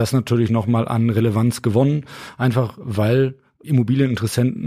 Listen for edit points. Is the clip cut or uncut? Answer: uncut